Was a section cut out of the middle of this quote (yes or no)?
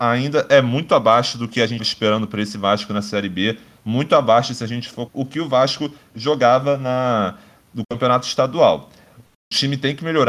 yes